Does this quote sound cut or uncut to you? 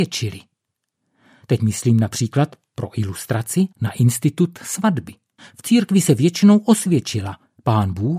cut